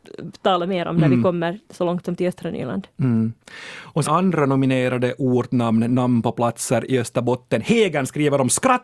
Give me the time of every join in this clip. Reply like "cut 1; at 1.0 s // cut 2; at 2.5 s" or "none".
cut 1; at 1.6 s // cut 2; at 4.0 s